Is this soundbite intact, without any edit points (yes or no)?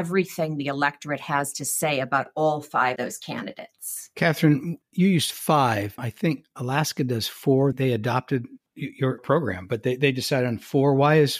no